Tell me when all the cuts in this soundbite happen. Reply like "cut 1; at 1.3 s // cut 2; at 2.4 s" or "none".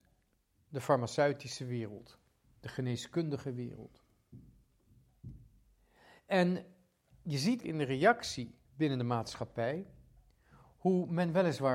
cut 1; at 7.6 s // cut 2; at 8.6 s